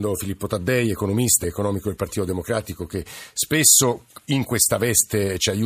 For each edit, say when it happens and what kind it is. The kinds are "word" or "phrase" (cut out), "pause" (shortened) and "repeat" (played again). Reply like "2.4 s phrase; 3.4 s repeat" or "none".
1.4 s word